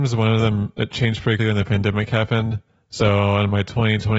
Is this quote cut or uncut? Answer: cut